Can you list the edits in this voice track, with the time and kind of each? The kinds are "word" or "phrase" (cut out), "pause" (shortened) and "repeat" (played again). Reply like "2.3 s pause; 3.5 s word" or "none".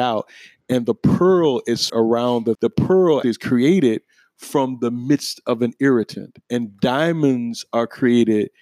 1.9 s word; 2.5 s word; 3.2 s word; 6.4 s pause